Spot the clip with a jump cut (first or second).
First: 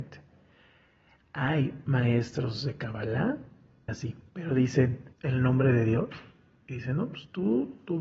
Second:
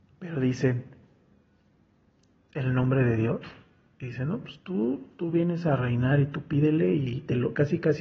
first